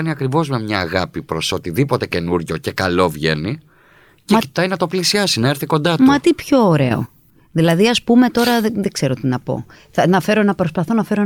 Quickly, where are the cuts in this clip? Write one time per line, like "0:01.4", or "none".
none